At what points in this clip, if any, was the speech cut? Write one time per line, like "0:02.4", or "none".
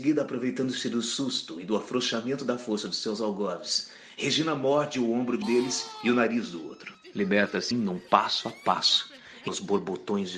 0:05.4
0:07.7
0:09.5